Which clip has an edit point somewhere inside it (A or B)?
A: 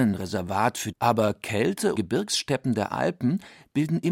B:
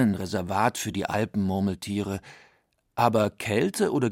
A